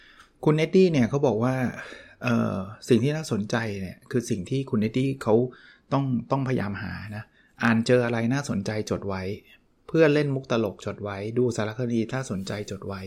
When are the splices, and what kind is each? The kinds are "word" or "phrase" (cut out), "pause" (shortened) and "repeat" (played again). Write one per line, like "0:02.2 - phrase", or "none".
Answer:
none